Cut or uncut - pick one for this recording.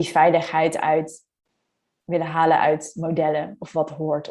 uncut